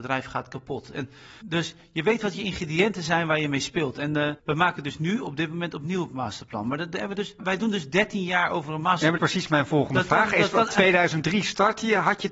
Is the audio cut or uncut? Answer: cut